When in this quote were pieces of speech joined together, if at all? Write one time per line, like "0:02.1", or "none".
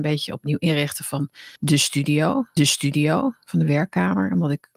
0:01.6
0:02.6